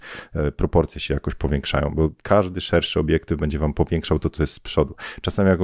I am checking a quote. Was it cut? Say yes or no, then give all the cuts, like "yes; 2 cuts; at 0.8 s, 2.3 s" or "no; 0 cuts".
no; 0 cuts